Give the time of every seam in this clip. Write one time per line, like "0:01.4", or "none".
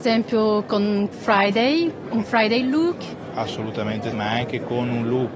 0:01.1
0:02.2
0:04.1